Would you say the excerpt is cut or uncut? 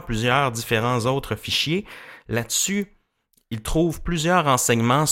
uncut